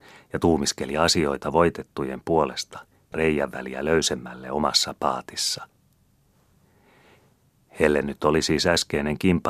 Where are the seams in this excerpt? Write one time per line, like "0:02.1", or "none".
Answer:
0:03.1

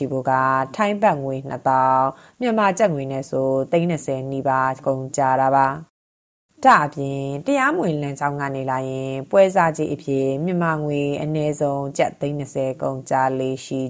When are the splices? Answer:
none

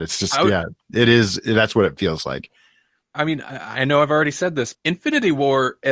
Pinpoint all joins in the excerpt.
0:04.7

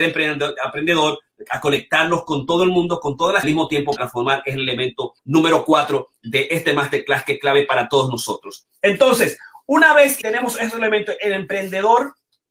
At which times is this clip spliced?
0:03.4
0:04.0
0:05.2
0:10.2

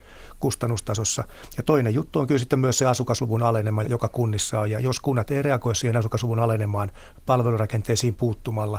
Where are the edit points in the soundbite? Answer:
0:03.8

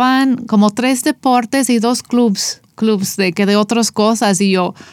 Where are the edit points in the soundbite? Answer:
0:03.3

